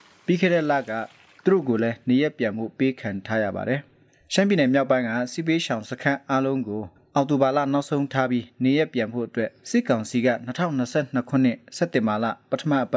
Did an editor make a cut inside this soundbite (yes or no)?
yes